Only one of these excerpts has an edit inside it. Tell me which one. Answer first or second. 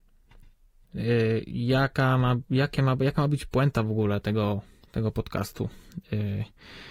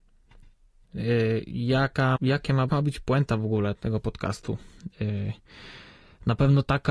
second